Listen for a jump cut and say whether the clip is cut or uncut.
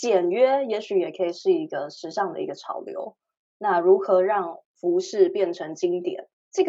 uncut